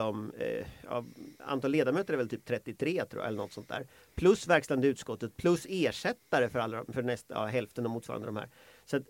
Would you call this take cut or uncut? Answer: uncut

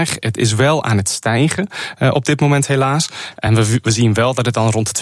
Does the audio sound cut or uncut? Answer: uncut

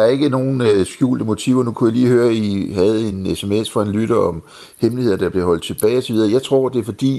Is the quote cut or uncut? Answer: uncut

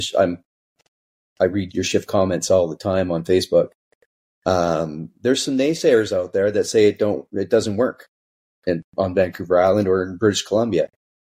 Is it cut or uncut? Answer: cut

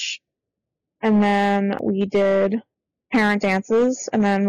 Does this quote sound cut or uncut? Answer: uncut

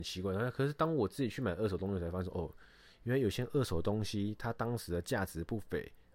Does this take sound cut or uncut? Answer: uncut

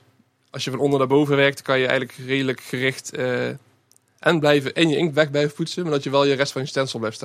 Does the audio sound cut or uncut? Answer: uncut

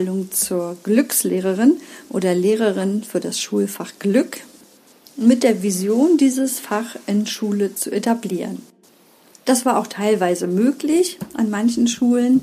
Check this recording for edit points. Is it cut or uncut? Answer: uncut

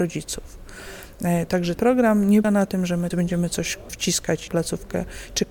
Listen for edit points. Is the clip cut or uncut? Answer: cut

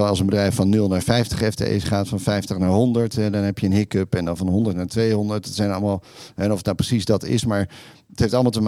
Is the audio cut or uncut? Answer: uncut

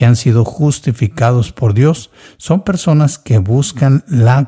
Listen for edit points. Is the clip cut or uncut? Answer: uncut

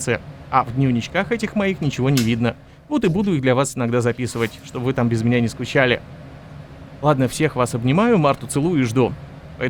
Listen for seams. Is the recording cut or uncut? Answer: uncut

